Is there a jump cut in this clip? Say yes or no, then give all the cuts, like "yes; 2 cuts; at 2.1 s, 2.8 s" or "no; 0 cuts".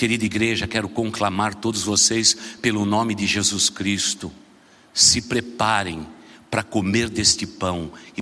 no; 0 cuts